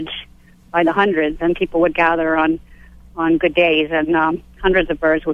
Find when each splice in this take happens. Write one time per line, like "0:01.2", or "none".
none

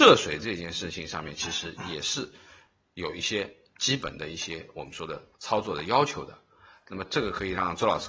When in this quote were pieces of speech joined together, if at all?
0:05.3

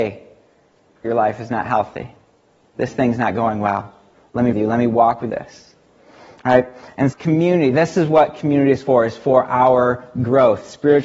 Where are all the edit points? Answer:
0:01.0
0:04.5
0:05.3
0:07.1

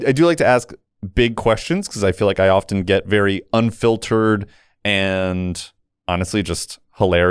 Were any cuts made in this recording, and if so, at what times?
none

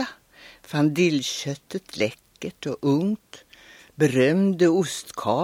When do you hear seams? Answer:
none

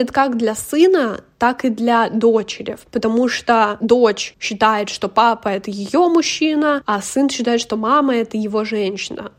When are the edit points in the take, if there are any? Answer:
none

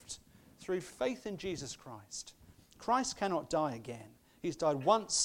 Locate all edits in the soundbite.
none

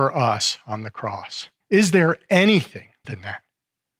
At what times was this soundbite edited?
0:01.6
0:03.0

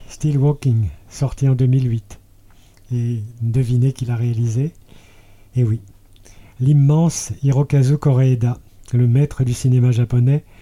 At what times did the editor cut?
none

